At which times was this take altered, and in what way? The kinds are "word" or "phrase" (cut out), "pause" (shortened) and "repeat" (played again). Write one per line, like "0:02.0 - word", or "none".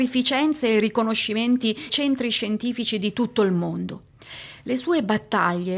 0:01.9 - word